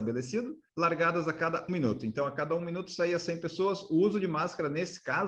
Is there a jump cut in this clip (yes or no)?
yes